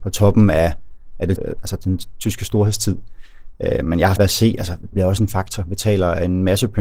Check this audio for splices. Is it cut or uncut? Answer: cut